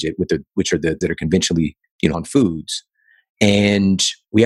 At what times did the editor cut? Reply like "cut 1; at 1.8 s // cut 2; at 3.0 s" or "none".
cut 1; at 1.0 s // cut 2; at 2.1 s